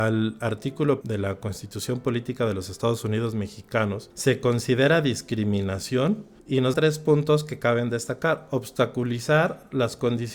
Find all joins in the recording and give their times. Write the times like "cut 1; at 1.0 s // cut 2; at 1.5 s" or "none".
cut 1; at 1.0 s // cut 2; at 6.7 s